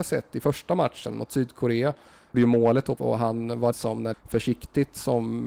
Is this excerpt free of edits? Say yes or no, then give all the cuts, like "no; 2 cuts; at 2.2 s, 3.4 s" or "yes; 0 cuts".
no; 4 cuts; at 2.3 s, 3.0 s, 3.7 s, 4.1 s